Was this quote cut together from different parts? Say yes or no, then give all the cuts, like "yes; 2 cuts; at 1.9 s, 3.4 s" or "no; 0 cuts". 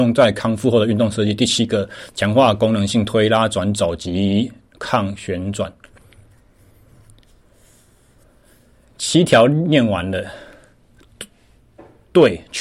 no; 0 cuts